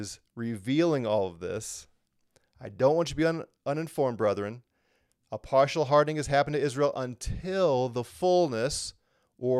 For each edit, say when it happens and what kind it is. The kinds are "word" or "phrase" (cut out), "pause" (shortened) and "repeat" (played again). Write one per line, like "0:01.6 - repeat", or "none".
none